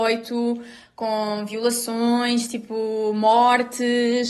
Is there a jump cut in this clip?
no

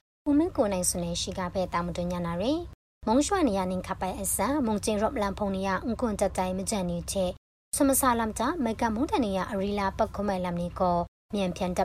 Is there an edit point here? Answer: no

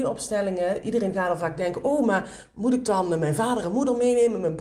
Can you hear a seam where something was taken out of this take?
no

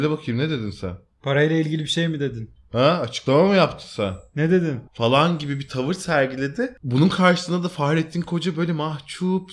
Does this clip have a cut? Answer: yes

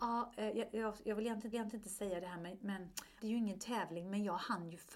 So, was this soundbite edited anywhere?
yes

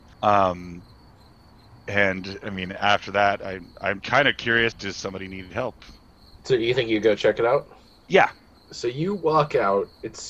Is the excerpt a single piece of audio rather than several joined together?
no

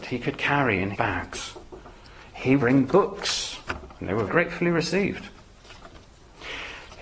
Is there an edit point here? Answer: yes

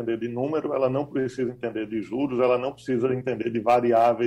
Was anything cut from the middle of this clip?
no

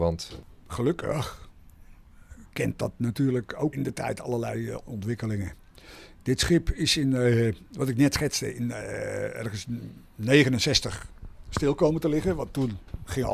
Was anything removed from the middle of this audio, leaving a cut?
yes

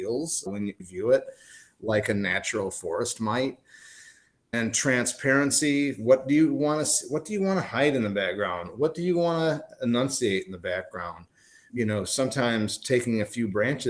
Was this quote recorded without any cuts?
yes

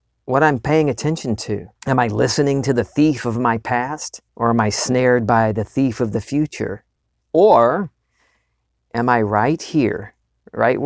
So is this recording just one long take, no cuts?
no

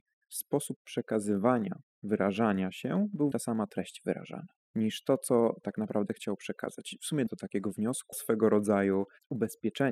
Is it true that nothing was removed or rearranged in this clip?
no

